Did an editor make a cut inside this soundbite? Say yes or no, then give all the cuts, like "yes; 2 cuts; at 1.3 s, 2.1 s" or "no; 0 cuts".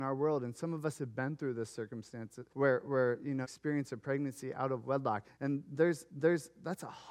yes; 4 cuts; at 2.5 s, 3.4 s, 5.2 s, 6.1 s